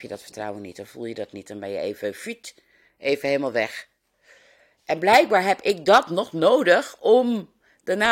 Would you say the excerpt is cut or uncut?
uncut